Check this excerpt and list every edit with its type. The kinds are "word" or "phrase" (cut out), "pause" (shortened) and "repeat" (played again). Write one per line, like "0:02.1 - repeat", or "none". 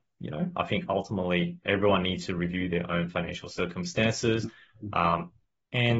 0:01.6 - pause

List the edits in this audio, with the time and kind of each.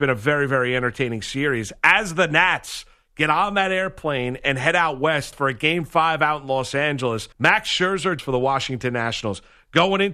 0:05.3 - word
0:07.3 - pause
0:08.2 - word

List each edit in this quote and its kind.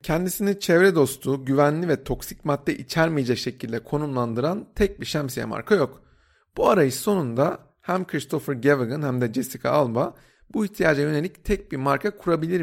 none

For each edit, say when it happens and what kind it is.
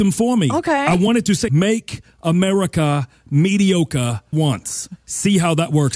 0:01.5 - word
0:04.3 - word

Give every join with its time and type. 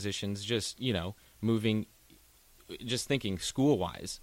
none

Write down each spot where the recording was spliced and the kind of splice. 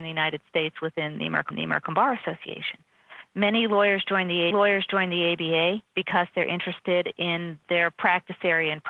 0:01.5 - repeat
0:04.5 - repeat

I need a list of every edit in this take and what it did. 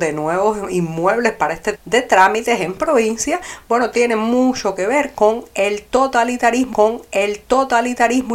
0:01.7 - word
0:06.7 - repeat

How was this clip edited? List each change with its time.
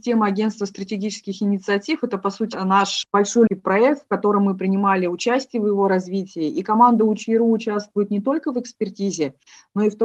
0:03.0 - word
0:03.5 - word

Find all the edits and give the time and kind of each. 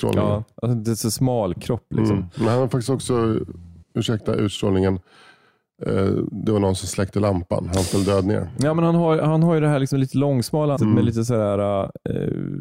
0:03.8 - pause
0:10.8 - word

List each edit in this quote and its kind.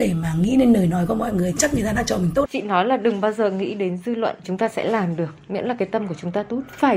0:01.6 - phrase
0:02.5 - word
0:04.4 - word

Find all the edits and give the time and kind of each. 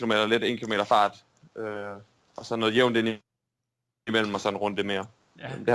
none

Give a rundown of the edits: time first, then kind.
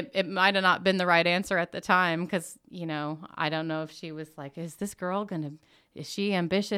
none

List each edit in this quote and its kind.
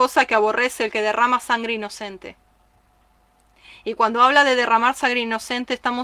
none

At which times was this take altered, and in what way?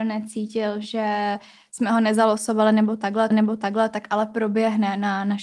0:03.3 - repeat

